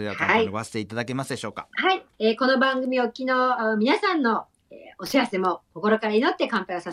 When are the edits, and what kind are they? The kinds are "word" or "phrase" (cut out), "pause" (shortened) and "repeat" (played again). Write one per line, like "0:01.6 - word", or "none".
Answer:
0:02.1 - pause